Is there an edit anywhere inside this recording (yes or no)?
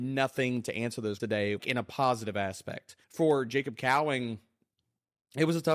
yes